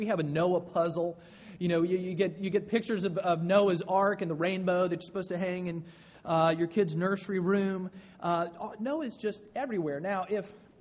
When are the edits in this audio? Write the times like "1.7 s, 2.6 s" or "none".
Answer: none